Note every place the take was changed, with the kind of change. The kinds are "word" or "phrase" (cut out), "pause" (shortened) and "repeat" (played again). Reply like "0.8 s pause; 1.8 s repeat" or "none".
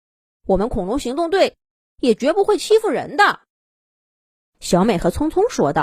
none

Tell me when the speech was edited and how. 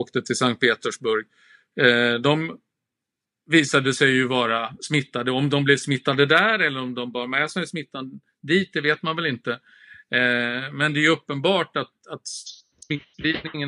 none

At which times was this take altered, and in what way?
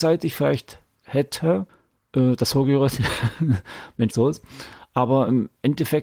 4.1 s phrase

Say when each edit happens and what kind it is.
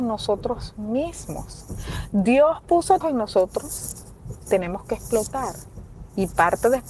3.0 s word; 4.5 s word

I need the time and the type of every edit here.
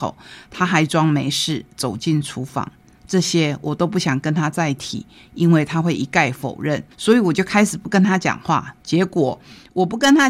6.9 s pause

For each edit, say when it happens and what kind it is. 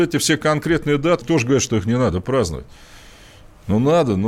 1.2 s word

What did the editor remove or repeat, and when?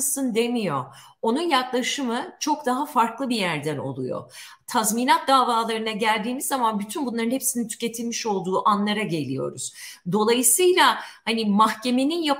none

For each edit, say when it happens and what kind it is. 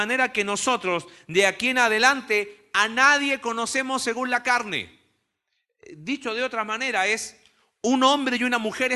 none

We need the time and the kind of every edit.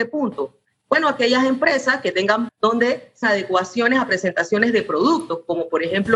2.5 s word; 3.2 s word

